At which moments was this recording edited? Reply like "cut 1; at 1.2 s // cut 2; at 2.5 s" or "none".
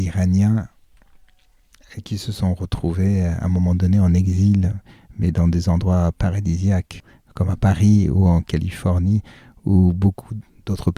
none